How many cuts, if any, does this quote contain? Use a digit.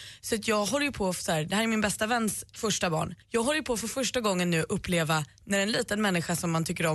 1